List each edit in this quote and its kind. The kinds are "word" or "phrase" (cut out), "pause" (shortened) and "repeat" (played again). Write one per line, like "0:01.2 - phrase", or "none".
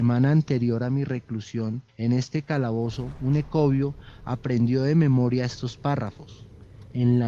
0:01.9 - pause